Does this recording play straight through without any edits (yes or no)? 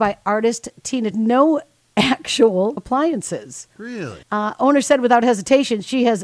no